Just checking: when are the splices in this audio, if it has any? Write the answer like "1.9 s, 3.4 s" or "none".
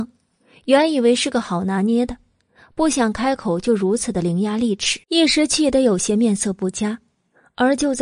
5.0 s